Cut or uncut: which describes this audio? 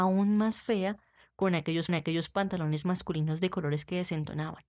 cut